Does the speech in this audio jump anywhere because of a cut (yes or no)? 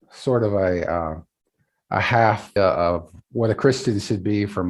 yes